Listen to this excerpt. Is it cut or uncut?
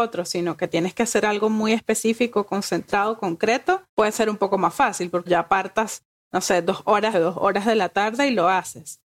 cut